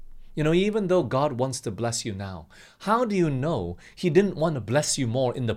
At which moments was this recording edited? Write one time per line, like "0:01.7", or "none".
none